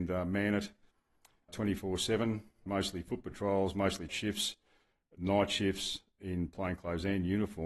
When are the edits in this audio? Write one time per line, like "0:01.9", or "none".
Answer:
0:04.1